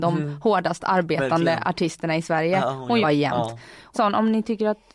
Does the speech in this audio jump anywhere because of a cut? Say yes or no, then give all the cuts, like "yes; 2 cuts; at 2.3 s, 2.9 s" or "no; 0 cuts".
yes; 2 cuts; at 3.0 s, 3.9 s